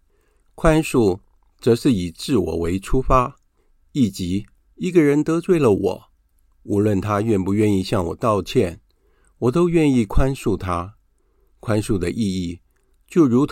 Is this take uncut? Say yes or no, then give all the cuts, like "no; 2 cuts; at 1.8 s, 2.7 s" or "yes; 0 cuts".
yes; 0 cuts